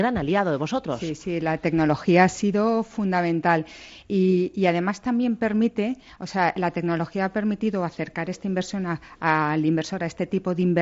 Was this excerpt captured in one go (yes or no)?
yes